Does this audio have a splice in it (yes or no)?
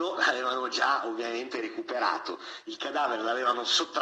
no